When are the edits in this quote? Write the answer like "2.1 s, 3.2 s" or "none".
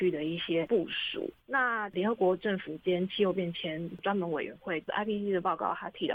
none